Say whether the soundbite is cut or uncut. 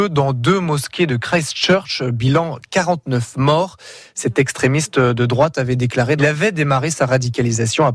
cut